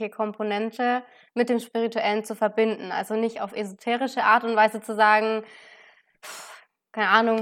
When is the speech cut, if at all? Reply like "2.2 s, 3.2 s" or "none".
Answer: none